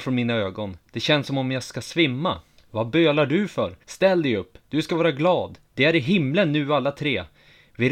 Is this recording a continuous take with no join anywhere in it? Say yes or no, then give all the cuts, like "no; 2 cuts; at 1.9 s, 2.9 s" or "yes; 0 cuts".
no; 3 cuts; at 2.6 s, 3.8 s, 5.6 s